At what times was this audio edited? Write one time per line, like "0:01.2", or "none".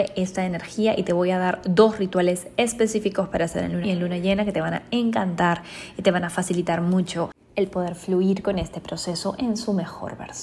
0:03.8